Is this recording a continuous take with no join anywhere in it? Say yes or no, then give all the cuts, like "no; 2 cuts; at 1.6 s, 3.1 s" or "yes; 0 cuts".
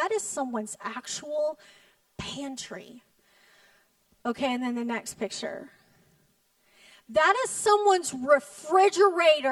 yes; 0 cuts